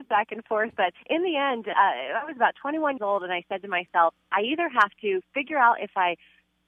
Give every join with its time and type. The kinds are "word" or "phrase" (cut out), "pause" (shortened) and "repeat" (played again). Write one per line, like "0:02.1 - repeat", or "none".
0:01.0 - pause
0:03.0 - word